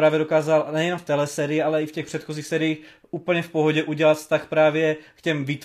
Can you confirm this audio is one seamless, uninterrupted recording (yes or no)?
yes